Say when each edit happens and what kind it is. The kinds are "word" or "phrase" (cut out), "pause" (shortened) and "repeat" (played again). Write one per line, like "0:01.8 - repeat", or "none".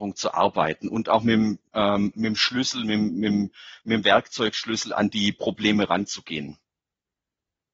0:01.6 - pause